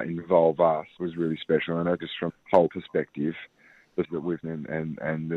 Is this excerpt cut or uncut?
cut